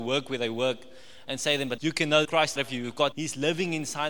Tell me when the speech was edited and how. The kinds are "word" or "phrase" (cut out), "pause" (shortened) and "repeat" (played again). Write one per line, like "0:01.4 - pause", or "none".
0:01.8 - word
0:02.2 - phrase
0:02.6 - word
0:03.1 - word